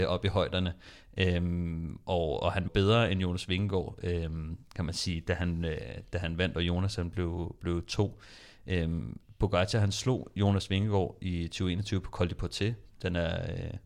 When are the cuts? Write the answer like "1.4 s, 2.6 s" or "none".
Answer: 2.7 s